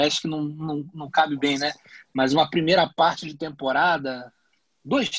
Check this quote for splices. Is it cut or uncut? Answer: uncut